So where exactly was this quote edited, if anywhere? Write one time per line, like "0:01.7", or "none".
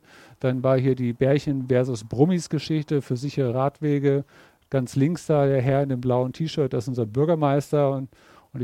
none